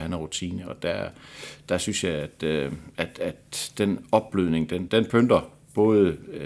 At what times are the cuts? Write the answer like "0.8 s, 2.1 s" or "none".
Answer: 4.9 s